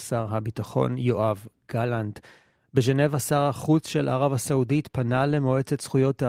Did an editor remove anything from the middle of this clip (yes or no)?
no